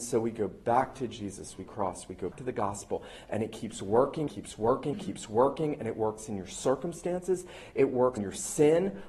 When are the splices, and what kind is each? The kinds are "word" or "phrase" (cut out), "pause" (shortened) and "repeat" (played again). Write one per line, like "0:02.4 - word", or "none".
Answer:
0:01.7 - phrase
0:02.3 - word
0:04.3 - phrase
0:04.9 - word
0:08.2 - word